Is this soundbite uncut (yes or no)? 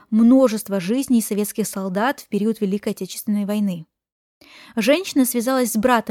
yes